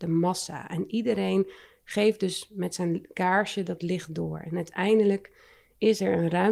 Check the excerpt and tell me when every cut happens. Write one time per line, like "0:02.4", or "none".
none